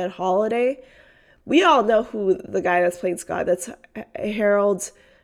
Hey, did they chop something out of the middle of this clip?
no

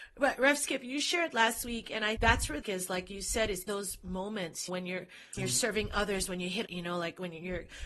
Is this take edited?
yes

